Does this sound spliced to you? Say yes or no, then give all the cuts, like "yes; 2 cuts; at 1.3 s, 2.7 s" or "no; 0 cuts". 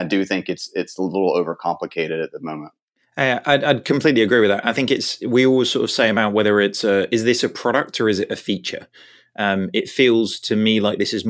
no; 0 cuts